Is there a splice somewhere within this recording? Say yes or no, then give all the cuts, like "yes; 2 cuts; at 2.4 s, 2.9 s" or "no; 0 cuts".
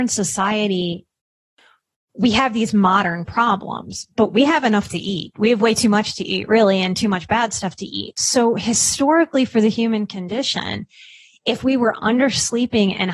no; 0 cuts